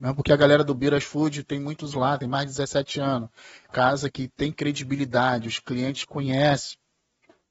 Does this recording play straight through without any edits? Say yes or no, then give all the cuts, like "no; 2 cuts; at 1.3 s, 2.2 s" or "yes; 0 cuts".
no; 3 cuts; at 1.9 s, 3.7 s, 4.1 s